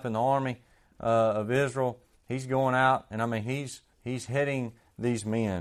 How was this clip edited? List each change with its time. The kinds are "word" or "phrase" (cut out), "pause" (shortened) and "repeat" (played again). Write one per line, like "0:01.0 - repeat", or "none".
0:03.9 - pause